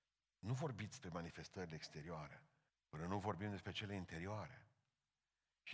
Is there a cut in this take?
yes; 2 cuts; at 1.0 s, 2.7 s

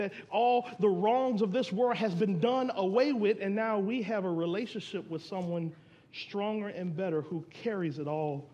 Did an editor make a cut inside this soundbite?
no; 0 cuts

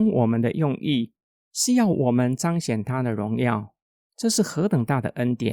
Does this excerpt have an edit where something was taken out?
no; 0 cuts

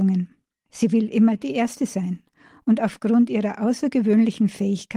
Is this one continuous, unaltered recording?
yes; 0 cuts

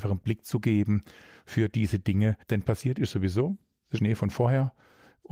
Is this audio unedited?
no; 2 cuts; at 2.4 s, 4.0 s

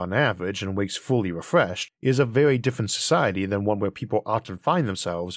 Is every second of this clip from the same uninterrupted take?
yes; 0 cuts

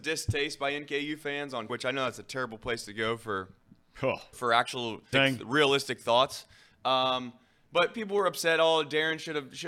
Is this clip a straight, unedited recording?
no; 3 cuts; at 1.7 s, 4.3 s, 5.1 s

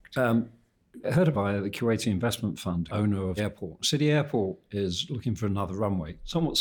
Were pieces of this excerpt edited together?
yes; 4 cuts; at 1.0 s, 1.3 s, 2.9 s, 3.4 s

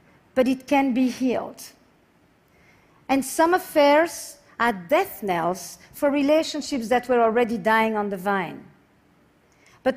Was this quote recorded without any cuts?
yes; 0 cuts

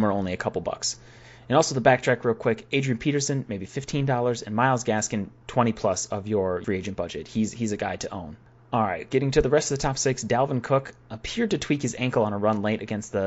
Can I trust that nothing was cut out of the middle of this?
yes; 0 cuts

